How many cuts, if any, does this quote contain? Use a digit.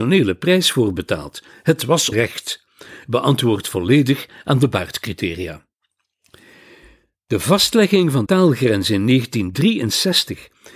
2